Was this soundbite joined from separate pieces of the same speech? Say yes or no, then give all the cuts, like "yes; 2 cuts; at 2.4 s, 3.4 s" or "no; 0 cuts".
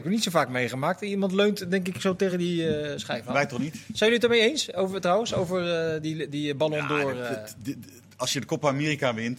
no; 0 cuts